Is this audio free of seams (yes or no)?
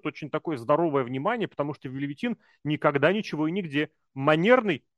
yes